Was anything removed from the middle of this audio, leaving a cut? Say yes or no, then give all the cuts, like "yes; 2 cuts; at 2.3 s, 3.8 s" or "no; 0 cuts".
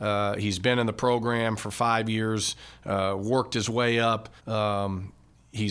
yes; 1 cut; at 4.4 s